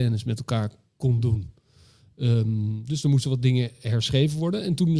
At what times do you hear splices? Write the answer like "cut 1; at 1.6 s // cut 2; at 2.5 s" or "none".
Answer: none